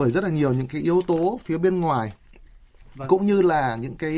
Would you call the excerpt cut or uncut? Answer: uncut